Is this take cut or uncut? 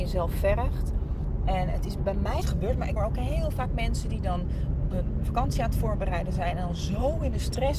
cut